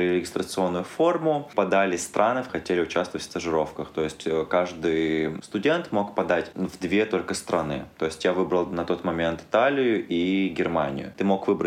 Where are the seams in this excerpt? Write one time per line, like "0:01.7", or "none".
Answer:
0:02.5